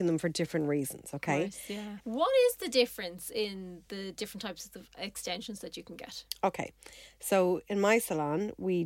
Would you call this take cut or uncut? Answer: uncut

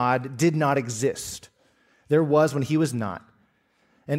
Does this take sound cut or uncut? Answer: uncut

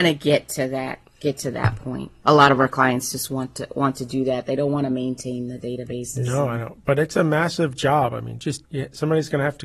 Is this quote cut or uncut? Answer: cut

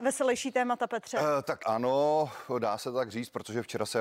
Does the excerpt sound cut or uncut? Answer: cut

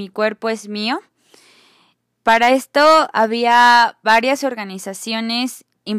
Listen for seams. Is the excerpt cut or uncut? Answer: uncut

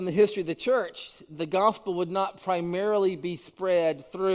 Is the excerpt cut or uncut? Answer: uncut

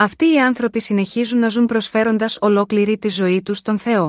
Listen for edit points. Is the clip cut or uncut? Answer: uncut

